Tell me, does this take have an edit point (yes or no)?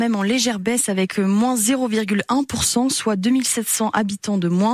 no